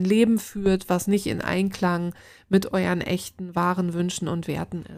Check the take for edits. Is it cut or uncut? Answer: uncut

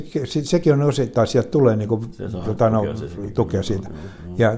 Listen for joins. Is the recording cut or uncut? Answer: uncut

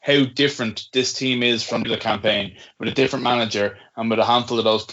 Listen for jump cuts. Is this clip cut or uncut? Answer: cut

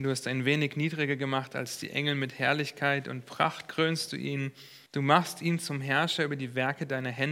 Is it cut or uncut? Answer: cut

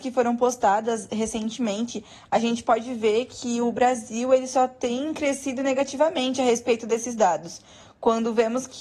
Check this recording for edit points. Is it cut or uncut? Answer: uncut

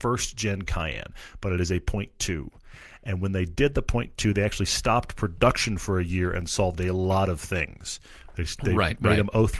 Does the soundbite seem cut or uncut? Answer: uncut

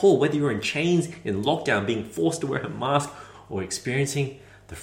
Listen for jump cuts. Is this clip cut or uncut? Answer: uncut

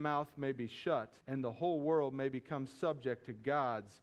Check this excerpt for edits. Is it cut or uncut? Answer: cut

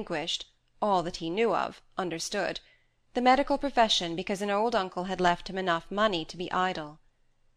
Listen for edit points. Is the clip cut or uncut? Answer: uncut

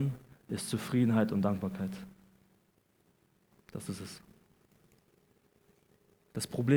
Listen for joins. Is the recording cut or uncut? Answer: uncut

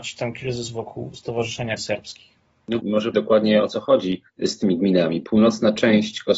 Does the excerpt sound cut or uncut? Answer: cut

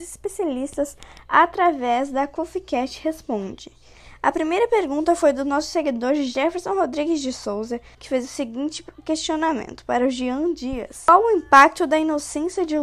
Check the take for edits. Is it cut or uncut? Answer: cut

